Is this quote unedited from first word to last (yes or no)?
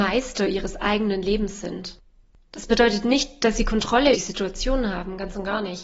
no